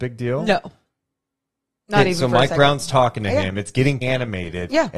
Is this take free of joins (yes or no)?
no